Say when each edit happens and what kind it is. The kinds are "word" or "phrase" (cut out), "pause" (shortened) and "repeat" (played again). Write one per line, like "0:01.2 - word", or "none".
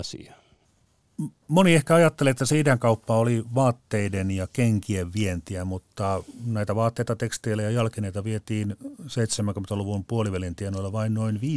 none